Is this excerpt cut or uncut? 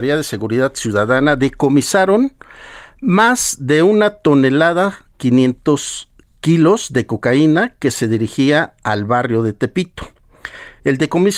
uncut